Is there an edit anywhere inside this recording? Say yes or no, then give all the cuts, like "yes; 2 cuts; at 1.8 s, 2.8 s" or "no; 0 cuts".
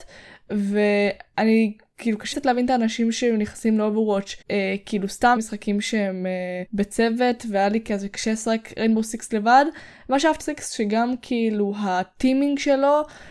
yes; 5 cuts; at 2.3 s, 4.4 s, 5.4 s, 6.7 s, 10.4 s